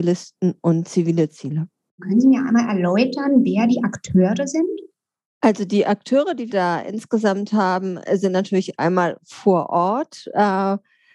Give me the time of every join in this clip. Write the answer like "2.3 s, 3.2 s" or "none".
6.5 s